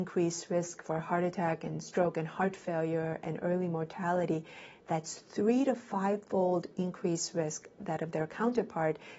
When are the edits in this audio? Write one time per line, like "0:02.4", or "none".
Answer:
none